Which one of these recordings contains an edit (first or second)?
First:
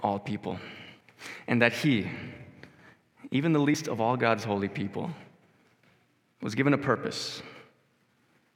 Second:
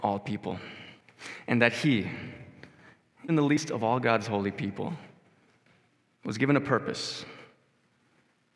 second